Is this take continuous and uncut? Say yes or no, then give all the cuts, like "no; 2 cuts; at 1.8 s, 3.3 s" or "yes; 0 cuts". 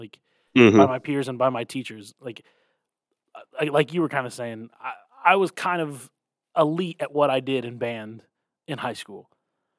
yes; 0 cuts